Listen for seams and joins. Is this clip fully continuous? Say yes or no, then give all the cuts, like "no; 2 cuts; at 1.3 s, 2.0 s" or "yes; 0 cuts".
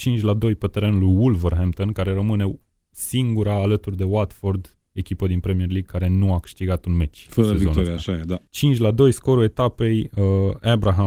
no; 1 cut; at 8.5 s